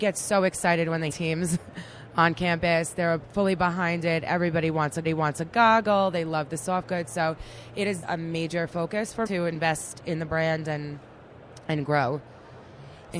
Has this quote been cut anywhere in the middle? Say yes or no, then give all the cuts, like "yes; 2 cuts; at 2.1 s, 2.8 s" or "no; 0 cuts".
yes; 4 cuts; at 1.1 s, 5.0 s, 8.0 s, 9.3 s